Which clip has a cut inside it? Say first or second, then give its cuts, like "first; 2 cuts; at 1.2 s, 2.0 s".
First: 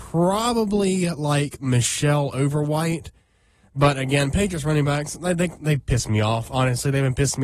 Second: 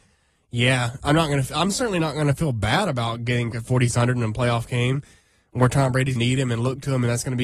second; 3 cuts; at 3.5 s, 3.9 s, 6.2 s